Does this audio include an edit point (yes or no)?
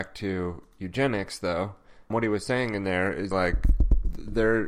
yes